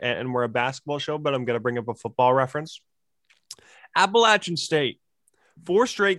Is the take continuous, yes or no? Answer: yes